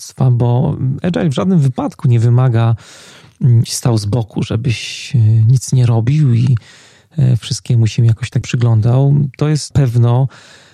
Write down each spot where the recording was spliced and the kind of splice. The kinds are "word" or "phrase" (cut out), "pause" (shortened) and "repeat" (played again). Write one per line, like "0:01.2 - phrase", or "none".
0:03.7 - phrase
0:08.4 - word
0:09.7 - word